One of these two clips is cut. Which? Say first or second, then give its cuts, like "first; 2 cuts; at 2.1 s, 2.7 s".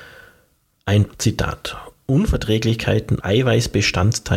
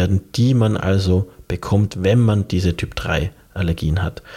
first; 2 cuts; at 1.1 s, 3.2 s